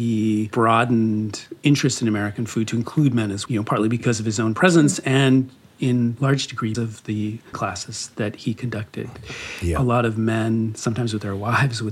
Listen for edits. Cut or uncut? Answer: cut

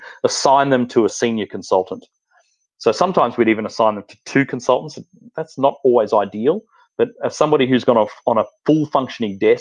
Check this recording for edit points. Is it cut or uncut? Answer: uncut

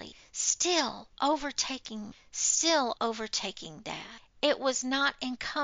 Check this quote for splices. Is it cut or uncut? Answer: cut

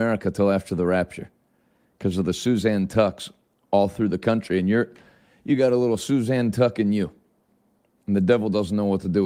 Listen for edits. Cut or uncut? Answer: uncut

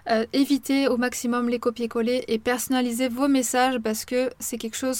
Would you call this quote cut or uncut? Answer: uncut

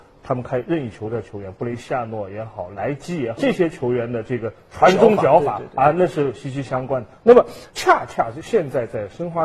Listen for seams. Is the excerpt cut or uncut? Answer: cut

